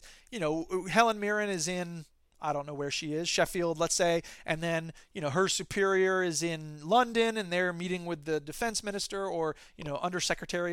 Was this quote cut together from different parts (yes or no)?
no